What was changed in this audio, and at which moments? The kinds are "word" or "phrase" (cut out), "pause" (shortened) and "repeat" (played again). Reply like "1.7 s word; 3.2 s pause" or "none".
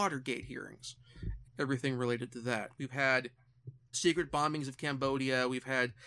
1.4 s word; 3.9 s word